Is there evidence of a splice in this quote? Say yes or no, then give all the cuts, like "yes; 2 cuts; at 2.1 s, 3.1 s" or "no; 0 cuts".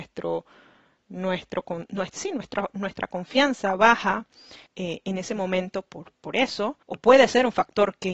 yes; 2 cuts; at 4.7 s, 6.8 s